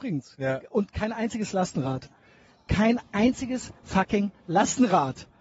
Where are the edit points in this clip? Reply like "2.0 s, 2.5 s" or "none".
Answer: none